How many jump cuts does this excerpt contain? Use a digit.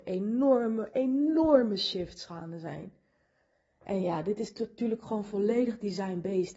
0